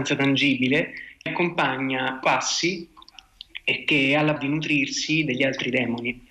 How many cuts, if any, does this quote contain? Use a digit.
3